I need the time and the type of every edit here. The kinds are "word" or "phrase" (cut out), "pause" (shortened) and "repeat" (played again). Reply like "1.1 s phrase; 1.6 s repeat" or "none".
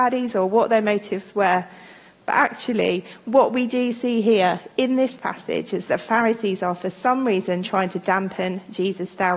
none